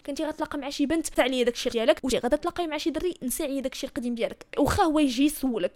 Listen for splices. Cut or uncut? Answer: cut